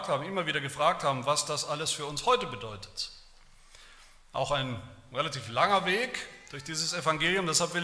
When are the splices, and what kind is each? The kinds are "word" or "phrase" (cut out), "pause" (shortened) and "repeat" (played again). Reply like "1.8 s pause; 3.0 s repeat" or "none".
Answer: none